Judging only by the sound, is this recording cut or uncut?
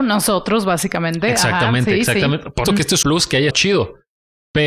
cut